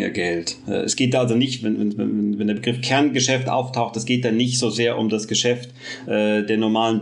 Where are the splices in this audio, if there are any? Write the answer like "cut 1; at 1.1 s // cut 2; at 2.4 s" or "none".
none